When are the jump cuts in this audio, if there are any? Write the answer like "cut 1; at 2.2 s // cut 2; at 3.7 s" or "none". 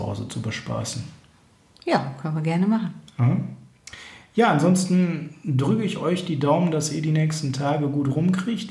none